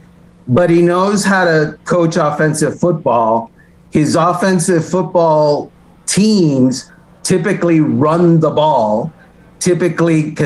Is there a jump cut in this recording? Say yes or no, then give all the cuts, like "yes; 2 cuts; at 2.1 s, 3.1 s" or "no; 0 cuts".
yes; 1 cut; at 7.1 s